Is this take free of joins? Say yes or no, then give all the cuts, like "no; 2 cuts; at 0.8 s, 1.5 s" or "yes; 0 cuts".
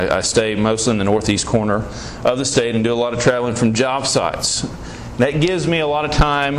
yes; 0 cuts